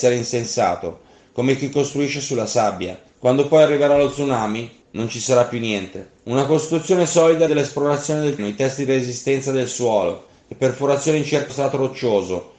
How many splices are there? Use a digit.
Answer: 6